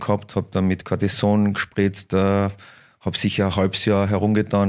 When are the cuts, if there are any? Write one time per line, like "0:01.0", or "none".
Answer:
none

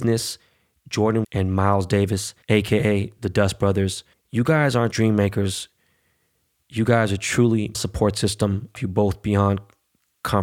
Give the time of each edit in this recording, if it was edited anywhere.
0:01.2
0:02.4
0:04.1
0:04.9
0:07.7
0:08.8

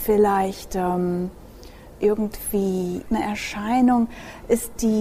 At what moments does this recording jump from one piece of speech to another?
0:03.1

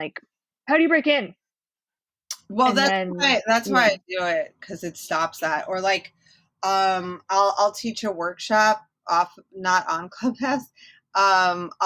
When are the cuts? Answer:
none

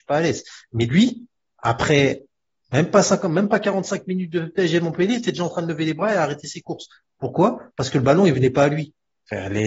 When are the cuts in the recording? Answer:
none

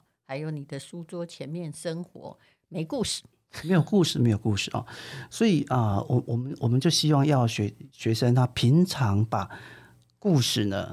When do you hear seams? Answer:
none

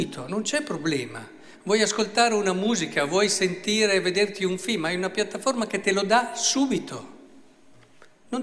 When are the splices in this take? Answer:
none

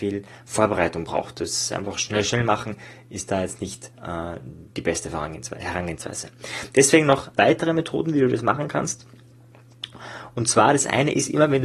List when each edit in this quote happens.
0:07.4

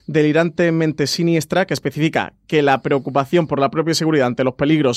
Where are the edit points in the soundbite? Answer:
none

